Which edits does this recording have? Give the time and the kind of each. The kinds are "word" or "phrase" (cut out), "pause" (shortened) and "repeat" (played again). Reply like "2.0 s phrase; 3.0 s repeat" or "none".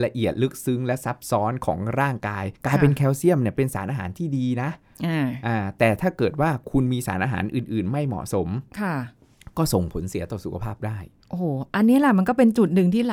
2.5 s pause